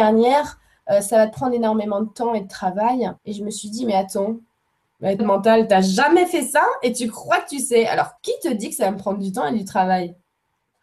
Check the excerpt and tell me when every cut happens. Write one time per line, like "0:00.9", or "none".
0:03.2
0:05.2
0:08.2